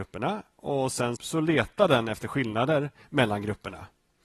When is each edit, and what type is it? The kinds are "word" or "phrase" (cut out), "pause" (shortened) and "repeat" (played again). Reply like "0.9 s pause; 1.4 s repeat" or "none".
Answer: 1.2 s word